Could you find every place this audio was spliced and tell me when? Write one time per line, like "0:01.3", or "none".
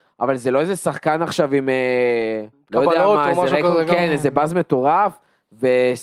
0:02.5